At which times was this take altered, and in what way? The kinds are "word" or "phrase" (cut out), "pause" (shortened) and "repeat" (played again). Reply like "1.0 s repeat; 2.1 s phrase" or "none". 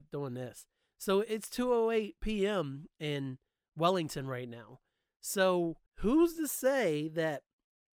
5.9 s pause

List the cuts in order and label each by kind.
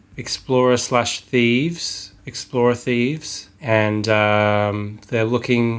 2.2 s pause; 3.5 s pause

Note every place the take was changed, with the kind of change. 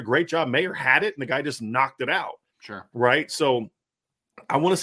2.5 s pause

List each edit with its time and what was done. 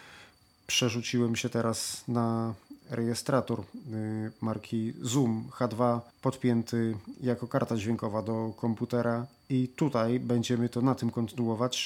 6.1 s pause

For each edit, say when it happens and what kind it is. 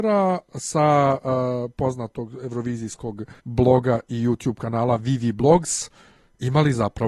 3.4 s pause

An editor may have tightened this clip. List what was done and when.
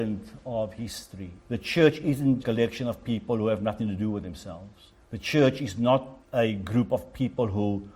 1.4 s pause; 2.4 s phrase; 5.0 s pause; 6.2 s pause

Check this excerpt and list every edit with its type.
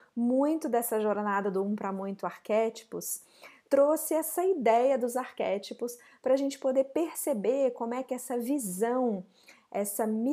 none

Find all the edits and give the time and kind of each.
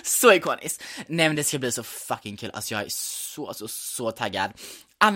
none

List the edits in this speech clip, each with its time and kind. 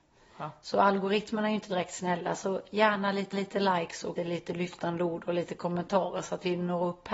3.3 s repeat; 4.2 s word

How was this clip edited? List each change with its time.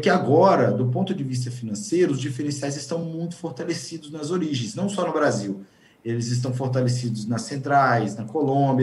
none

